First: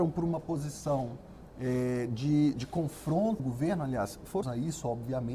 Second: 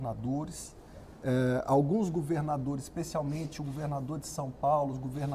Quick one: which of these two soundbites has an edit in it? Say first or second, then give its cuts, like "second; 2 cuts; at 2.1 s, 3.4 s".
first; 3 cuts; at 2.5 s, 3.4 s, 4.4 s